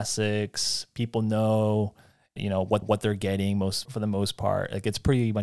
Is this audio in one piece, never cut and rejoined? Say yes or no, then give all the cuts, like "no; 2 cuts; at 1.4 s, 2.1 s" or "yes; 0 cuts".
no; 3 cuts; at 2.4 s, 2.8 s, 3.8 s